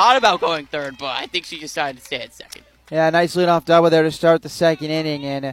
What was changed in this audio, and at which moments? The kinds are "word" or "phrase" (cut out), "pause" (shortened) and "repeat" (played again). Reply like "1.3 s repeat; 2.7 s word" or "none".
none